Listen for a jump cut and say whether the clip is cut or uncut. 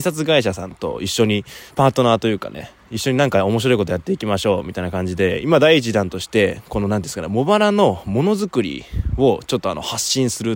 cut